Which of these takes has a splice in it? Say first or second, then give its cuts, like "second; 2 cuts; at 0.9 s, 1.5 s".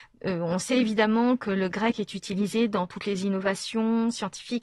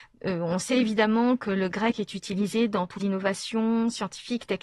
second; 1 cut; at 3.0 s